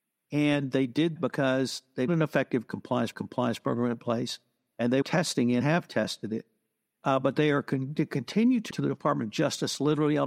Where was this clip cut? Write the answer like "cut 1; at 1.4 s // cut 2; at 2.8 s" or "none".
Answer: cut 1; at 1.2 s // cut 2; at 2.1 s // cut 3; at 3.1 s // cut 4; at 5.0 s // cut 5; at 5.6 s // cut 6; at 7.9 s // cut 7; at 8.7 s